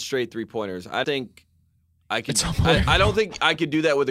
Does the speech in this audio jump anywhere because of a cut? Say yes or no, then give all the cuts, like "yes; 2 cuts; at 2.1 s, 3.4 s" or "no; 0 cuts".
yes; 1 cut; at 1.0 s